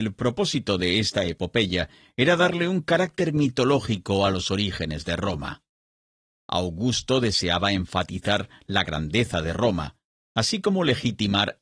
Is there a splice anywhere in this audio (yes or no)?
no